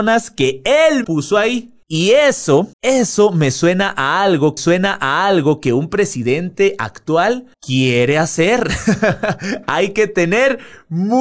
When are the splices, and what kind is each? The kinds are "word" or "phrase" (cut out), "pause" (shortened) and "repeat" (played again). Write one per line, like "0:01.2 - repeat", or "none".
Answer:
0:01.0 - word
0:01.8 - pause
0:02.7 - pause
0:04.6 - repeat
0:07.5 - pause